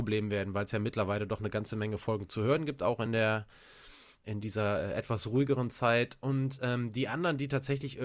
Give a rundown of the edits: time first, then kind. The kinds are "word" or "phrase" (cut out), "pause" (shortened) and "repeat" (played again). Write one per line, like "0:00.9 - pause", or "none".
none

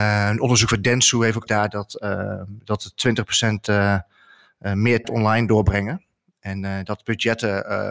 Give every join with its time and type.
0:01.5 - word
0:05.0 - word

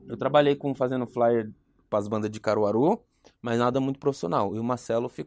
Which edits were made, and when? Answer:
none

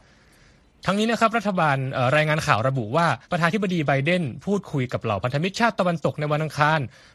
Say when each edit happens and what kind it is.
0:03.2 - pause

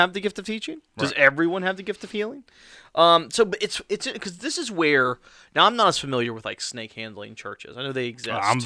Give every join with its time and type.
none

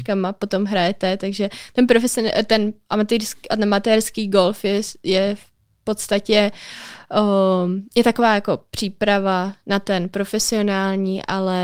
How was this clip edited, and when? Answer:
none

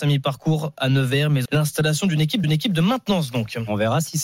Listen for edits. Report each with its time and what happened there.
0:01.4 - word
0:02.4 - repeat

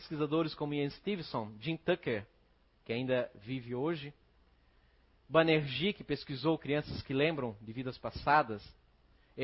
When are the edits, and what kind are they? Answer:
none

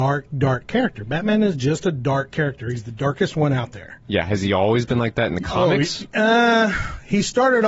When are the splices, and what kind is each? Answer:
none

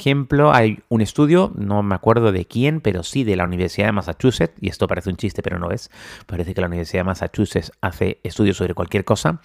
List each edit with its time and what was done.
none

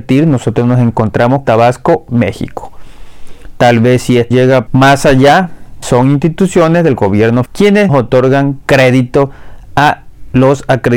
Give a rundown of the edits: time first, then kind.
0:01.4 - word
0:04.3 - word
0:04.7 - word
0:05.8 - word
0:07.5 - word
0:07.9 - word

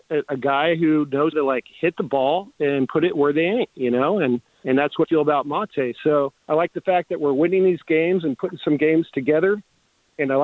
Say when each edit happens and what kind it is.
0:01.3 - word
0:04.5 - pause
0:05.0 - word
0:06.4 - pause

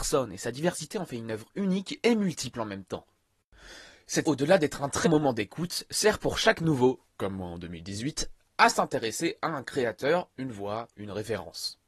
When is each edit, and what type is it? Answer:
0:04.2 - word
0:05.0 - word

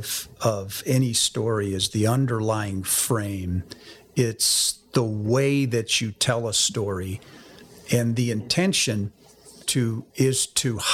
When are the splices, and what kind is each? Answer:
0:09.6 - word

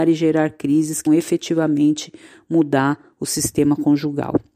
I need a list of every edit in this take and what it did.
0:01.1 - word

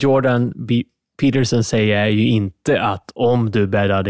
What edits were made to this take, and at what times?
none

